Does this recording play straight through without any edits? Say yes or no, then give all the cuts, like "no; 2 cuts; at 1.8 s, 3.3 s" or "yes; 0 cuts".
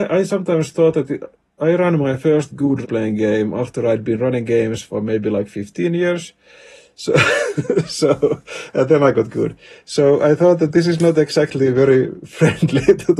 no; 1 cut; at 2.8 s